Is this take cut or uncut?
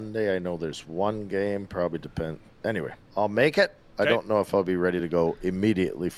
uncut